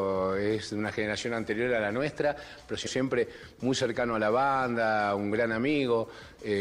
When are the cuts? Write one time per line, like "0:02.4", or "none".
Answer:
0:02.9